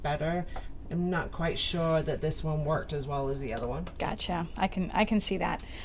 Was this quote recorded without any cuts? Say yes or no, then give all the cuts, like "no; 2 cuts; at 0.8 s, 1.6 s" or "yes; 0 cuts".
yes; 0 cuts